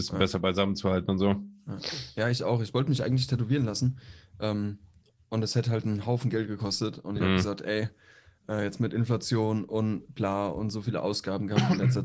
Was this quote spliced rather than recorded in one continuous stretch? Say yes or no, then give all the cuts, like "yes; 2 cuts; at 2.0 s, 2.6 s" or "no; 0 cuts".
no; 0 cuts